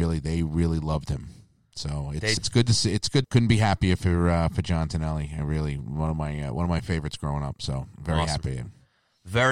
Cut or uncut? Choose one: cut